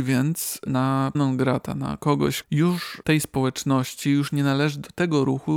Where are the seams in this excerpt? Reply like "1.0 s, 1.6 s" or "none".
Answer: 1.1 s, 2.4 s, 3.0 s